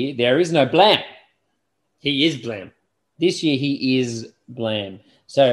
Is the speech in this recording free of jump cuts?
yes; 0 cuts

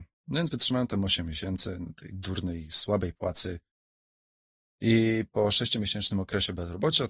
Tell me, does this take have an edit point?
no; 0 cuts

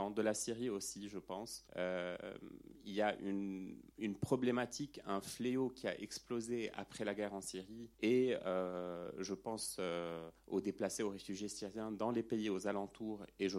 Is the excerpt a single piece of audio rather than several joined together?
no; 4 cuts; at 1.7 s, 3.9 s, 7.9 s, 10.4 s

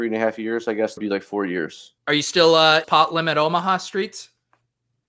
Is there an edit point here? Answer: yes; 3 cuts; at 1.0 s, 2.0 s, 2.8 s

